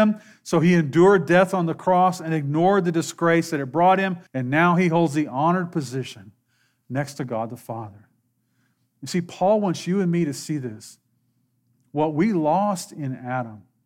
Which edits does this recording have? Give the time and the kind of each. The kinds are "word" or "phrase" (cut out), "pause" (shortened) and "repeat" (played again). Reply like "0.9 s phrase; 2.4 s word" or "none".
4.3 s pause